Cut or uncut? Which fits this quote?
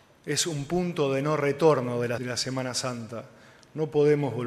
cut